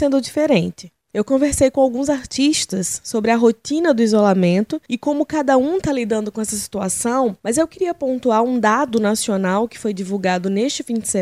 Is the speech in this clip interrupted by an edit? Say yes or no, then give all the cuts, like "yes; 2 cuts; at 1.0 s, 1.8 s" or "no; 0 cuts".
yes; 1 cut; at 7.4 s